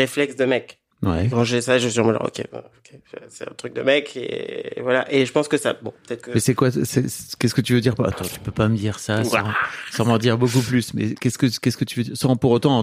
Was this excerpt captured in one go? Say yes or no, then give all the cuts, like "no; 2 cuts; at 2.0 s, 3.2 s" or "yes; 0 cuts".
no; 1 cut; at 0.9 s